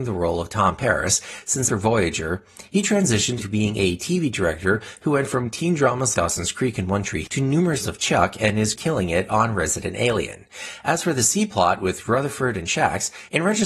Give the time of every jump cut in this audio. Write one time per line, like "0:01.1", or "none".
0:01.7
0:03.4
0:06.1
0:07.3
0:07.8
0:08.7